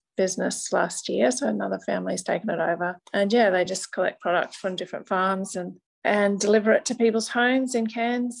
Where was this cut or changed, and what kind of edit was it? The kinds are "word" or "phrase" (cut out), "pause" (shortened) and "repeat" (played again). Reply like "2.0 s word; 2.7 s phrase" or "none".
none